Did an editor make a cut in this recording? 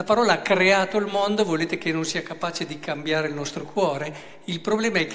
no; 0 cuts

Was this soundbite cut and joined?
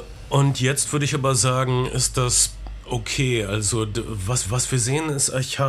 yes; 1 cut; at 4.4 s

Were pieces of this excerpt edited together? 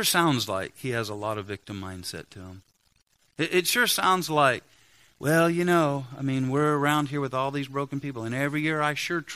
no; 0 cuts

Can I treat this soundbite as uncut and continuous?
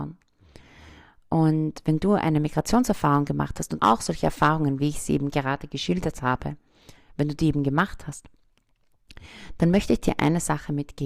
no; 1 cut; at 3.8 s

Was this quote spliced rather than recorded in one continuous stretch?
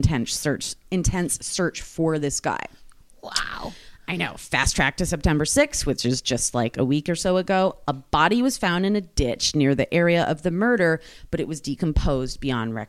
no; 0 cuts

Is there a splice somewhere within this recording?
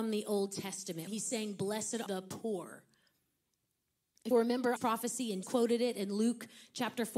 yes; 5 cuts; at 1.1 s, 2.1 s, 4.3 s, 4.8 s, 5.4 s

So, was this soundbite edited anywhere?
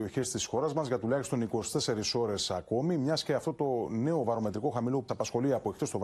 yes; 1 cut; at 5.1 s

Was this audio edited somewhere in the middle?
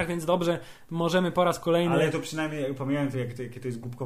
yes; 1 cut; at 3.1 s

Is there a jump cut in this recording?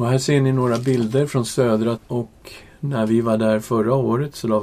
yes; 1 cut; at 2.0 s

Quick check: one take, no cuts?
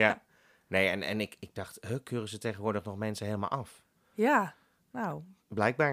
yes; 0 cuts

